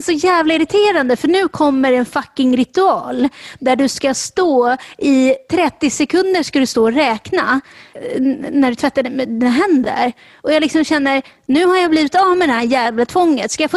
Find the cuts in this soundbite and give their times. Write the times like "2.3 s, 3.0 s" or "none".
none